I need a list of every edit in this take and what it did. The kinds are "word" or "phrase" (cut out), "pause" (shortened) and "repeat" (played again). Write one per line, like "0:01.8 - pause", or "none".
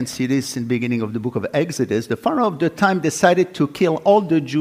none